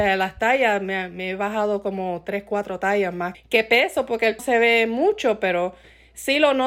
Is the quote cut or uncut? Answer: cut